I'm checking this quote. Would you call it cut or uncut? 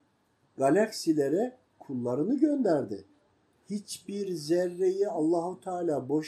uncut